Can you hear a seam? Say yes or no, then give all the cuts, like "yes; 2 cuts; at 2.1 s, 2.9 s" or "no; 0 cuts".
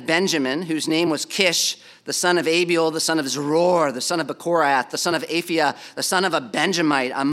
no; 0 cuts